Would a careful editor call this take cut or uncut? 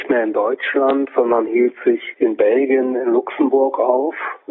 uncut